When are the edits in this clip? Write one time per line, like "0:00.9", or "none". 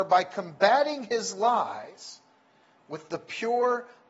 none